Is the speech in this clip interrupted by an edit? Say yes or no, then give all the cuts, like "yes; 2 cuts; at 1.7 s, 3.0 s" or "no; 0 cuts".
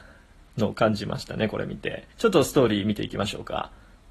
yes; 1 cut; at 2.1 s